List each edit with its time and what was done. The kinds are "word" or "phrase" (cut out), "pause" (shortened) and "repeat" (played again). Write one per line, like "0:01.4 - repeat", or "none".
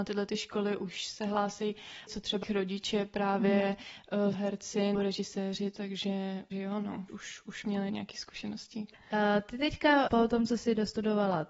0:02.1 - word
0:02.4 - word
0:04.3 - word
0:04.9 - word
0:06.5 - word
0:07.1 - word
0:07.9 - word
0:10.1 - word